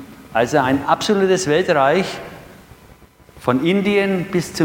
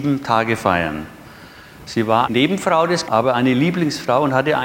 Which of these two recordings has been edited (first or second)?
second